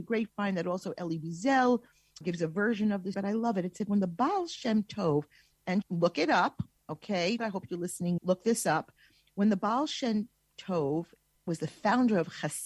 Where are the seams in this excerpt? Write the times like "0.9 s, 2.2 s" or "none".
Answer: 2.2 s, 3.1 s, 5.8 s, 7.4 s, 8.2 s